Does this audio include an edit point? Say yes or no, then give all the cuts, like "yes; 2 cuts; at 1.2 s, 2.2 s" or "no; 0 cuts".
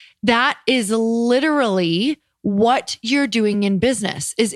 no; 0 cuts